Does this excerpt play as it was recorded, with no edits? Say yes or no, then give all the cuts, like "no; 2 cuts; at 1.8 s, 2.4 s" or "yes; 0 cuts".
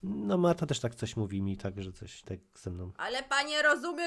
no; 1 cut; at 2.2 s